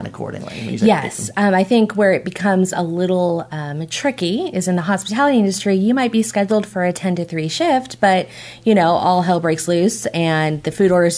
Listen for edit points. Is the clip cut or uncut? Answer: uncut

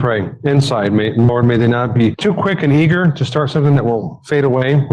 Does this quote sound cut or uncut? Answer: uncut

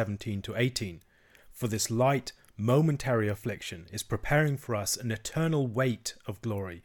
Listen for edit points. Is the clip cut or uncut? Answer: uncut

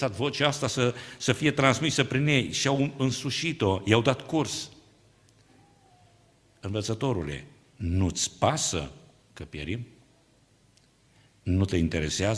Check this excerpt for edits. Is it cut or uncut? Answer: uncut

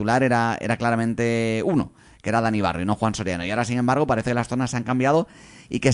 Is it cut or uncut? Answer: uncut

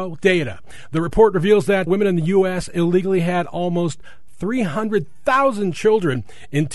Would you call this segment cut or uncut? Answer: cut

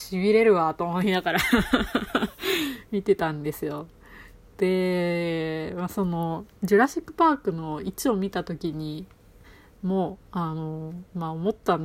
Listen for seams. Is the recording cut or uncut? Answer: cut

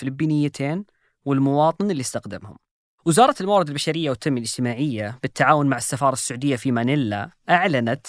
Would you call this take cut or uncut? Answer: uncut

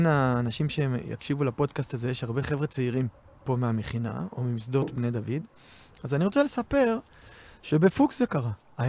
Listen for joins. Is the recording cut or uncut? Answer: uncut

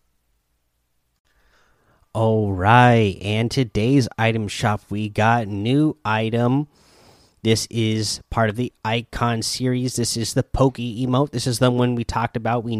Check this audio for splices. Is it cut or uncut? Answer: uncut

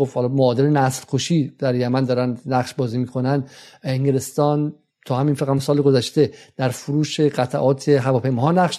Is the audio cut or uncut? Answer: uncut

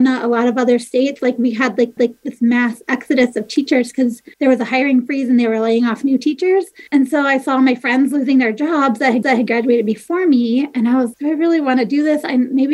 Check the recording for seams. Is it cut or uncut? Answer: cut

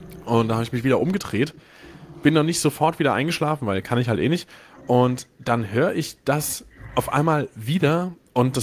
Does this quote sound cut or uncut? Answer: uncut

